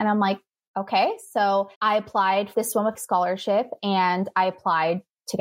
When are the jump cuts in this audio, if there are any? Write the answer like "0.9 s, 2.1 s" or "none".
1.7 s, 2.5 s, 2.9 s

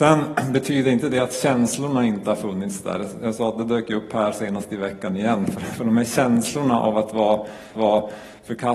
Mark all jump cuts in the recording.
7.7 s

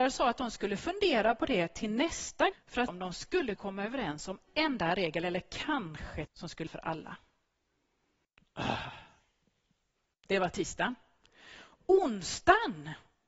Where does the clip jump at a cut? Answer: 2.5 s, 2.9 s, 3.6 s, 4.5 s, 6.3 s, 6.7 s

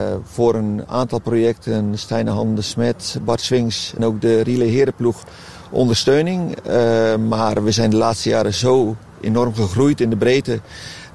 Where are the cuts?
4.0 s

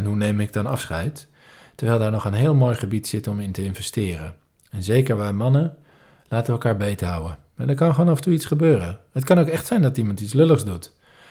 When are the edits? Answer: none

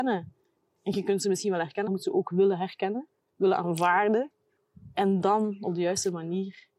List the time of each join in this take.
1.9 s, 5.2 s

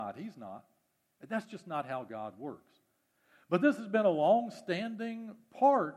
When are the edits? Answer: none

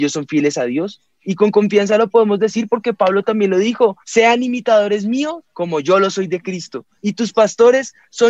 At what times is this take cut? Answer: 4.0 s, 5.5 s, 7.0 s

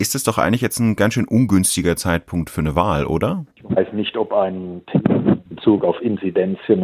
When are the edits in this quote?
3.5 s, 5.5 s

